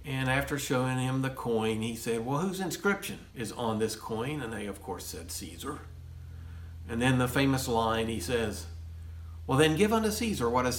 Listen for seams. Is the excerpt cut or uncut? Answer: cut